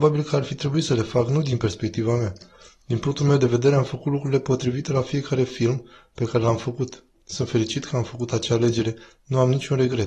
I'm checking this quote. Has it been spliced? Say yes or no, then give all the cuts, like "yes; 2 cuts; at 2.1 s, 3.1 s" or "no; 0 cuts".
no; 0 cuts